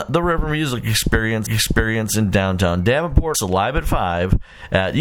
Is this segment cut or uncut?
cut